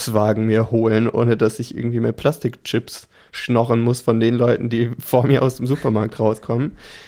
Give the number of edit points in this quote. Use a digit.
0